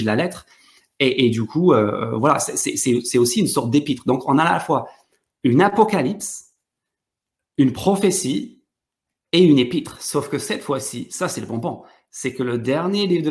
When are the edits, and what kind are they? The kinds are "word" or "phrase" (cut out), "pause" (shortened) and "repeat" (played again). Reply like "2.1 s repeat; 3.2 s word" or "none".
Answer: none